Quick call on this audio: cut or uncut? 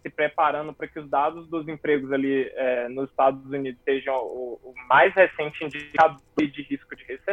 cut